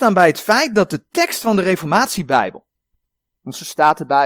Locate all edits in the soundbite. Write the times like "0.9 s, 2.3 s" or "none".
none